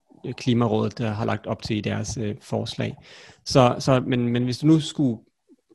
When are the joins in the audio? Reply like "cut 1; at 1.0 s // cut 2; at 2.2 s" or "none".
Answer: none